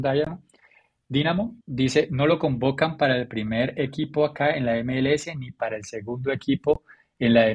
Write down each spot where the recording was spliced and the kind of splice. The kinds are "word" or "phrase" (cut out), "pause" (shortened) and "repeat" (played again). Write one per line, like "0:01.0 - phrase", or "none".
0:01.6 - pause